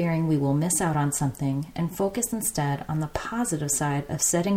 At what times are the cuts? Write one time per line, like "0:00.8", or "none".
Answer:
none